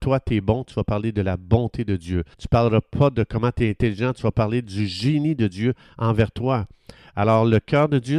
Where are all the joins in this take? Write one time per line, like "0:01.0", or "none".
0:02.3